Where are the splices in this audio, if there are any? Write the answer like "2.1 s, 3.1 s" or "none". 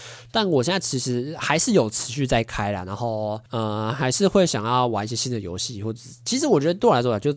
3.5 s